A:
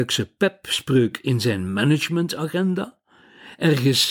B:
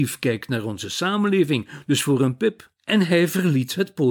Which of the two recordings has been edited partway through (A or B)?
B